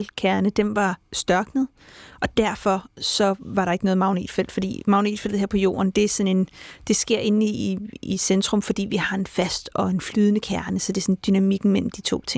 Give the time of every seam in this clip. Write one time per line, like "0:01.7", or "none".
none